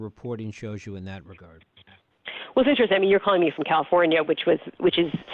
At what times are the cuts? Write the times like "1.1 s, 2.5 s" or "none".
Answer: none